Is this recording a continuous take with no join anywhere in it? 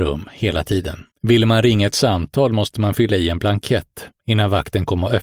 no; 1 cut; at 1.1 s

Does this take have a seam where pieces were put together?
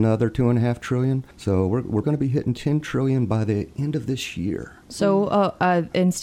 yes; 2 cuts; at 1.3 s, 2.0 s

